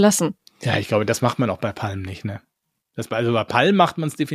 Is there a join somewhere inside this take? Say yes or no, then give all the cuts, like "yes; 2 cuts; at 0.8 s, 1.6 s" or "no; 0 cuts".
no; 0 cuts